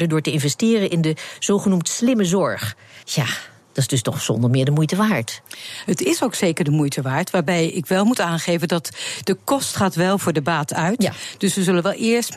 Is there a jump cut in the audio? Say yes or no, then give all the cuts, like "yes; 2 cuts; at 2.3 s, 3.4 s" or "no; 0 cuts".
yes; 1 cut; at 3.0 s